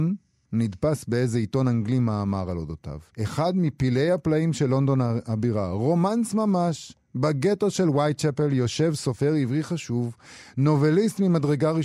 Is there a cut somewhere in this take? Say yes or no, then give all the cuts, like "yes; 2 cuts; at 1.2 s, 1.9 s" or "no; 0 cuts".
yes; 1 cut; at 3.1 s